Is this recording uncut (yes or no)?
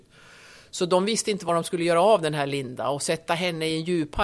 yes